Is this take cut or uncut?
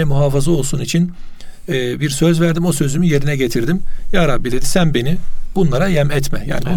uncut